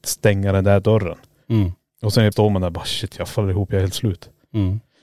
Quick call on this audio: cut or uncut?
cut